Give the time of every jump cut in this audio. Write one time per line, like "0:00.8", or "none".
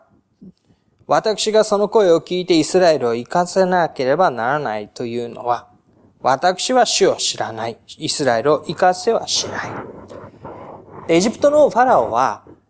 none